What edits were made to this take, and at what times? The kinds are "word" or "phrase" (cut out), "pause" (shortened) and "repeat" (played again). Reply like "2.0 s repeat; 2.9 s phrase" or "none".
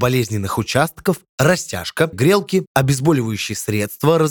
2.1 s word